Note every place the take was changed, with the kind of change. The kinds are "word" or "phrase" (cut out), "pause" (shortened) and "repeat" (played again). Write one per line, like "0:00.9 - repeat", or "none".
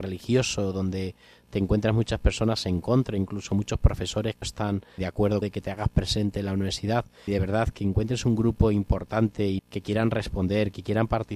0:04.4 - word
0:05.0 - word
0:05.4 - word
0:07.3 - word
0:09.6 - word